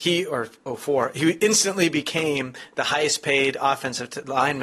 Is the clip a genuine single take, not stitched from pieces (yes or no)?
yes